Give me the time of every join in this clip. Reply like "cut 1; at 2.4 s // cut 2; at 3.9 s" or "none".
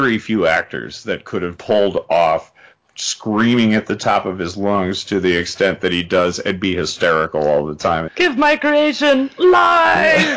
cut 1; at 1.6 s // cut 2; at 8.1 s